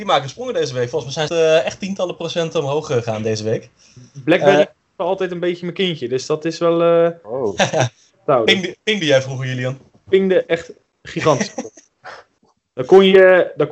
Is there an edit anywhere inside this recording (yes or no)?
yes